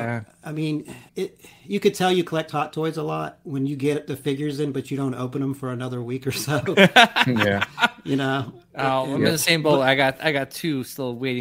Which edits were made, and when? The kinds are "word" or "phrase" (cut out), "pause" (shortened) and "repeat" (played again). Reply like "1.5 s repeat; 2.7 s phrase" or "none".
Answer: 1.1 s pause